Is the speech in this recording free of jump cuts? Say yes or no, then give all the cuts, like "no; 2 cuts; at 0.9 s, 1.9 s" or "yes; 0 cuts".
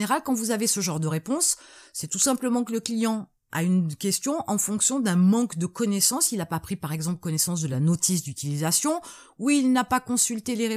yes; 0 cuts